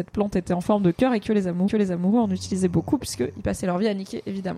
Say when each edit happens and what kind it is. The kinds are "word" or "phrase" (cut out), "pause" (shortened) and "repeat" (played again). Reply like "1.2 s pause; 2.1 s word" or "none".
1.7 s repeat

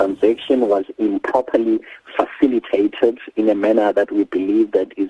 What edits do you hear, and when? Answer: none

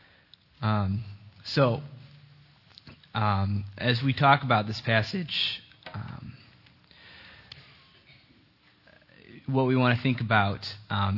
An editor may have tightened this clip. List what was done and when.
1.4 s pause

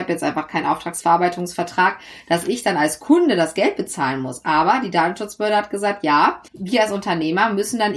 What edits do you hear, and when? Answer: 6.5 s pause

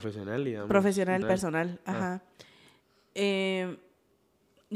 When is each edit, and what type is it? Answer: 1.2 s word

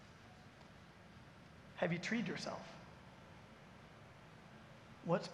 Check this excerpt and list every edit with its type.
none

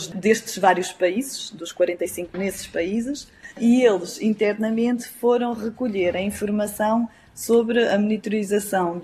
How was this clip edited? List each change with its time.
2.3 s phrase; 3.5 s pause

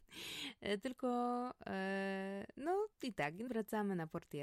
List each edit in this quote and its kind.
2.9 s pause; 3.5 s word

